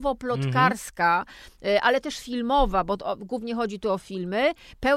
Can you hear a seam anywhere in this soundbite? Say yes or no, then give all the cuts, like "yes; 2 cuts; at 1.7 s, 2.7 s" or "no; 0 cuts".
no; 0 cuts